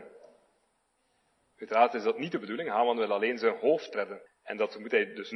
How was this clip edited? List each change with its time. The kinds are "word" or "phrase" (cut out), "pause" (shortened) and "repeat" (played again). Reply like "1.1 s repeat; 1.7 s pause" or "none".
4.3 s pause